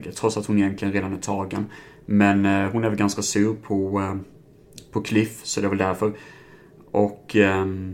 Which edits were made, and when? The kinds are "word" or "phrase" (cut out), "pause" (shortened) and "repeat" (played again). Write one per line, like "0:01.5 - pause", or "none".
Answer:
none